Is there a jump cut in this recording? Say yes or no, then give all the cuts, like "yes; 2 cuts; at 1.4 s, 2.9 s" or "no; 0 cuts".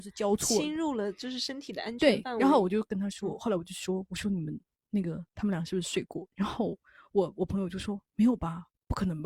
no; 0 cuts